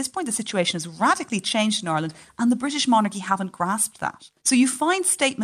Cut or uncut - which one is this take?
cut